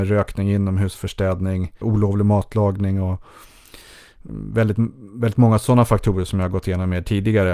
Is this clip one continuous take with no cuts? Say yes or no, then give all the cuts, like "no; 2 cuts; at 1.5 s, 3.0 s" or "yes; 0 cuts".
no; 3 cuts; at 0.9 s, 1.8 s, 4.3 s